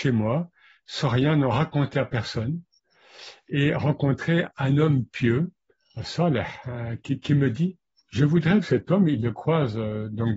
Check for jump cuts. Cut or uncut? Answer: cut